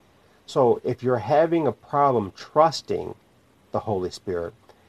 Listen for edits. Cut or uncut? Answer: uncut